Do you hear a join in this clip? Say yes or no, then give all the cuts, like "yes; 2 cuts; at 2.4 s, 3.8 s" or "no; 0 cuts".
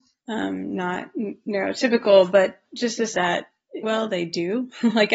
yes; 2 cuts; at 3.1 s, 3.8 s